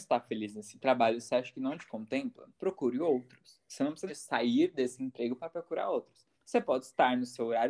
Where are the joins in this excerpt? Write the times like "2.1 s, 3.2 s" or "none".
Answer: 2.5 s, 4.1 s, 6.3 s